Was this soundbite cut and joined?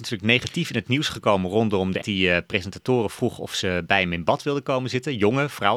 yes; 1 cut; at 2.0 s

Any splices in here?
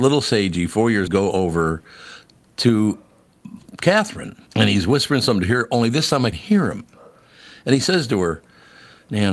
yes; 3 cuts; at 1.1 s, 4.5 s, 6.3 s

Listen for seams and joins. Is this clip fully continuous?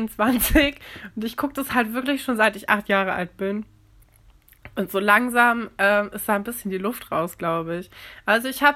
yes; 0 cuts

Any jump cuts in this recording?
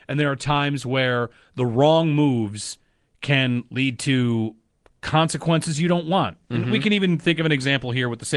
no; 0 cuts

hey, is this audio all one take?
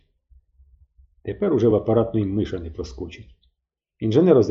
yes; 0 cuts

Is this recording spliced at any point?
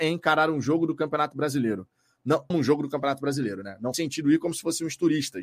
yes; 2 cuts; at 2.5 s, 3.9 s

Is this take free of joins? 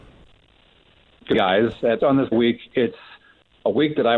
no; 3 cuts; at 1.3 s, 2.0 s, 2.3 s

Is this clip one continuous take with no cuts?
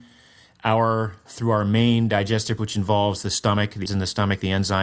no; 3 cuts; at 1.3 s, 2.6 s, 3.9 s

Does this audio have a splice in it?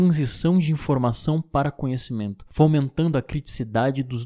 no; 0 cuts

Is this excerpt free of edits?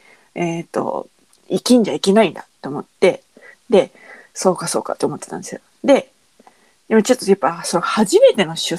yes; 0 cuts

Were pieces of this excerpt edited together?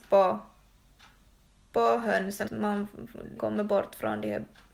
yes; 2 cuts; at 2.4 s, 3.4 s

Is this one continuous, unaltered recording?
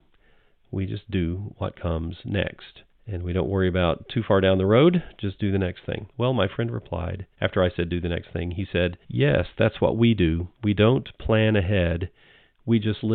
no; 5 cuts; at 2.9 s, 6.1 s, 7.3 s, 9.0 s, 10.5 s

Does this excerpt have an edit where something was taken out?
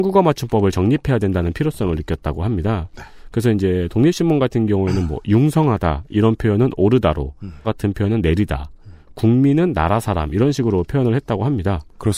yes; 1 cut; at 7.6 s

